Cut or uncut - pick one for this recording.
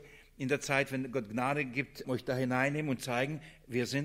cut